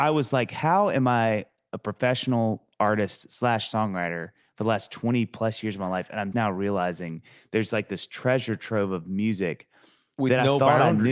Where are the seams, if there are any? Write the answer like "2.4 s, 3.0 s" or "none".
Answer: 6.3 s